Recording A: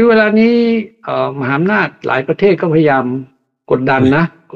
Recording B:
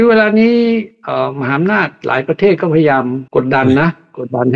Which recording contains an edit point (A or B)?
B